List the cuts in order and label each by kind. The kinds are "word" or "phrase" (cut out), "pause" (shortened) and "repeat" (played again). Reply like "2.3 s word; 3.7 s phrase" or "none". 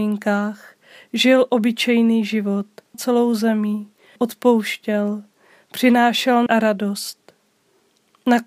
2.9 s phrase; 4.2 s word; 6.5 s word